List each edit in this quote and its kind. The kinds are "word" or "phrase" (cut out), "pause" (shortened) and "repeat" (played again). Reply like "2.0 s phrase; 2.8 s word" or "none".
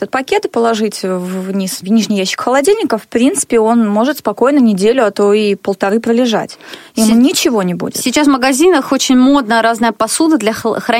1.8 s word